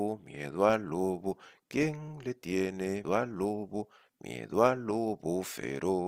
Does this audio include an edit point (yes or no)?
yes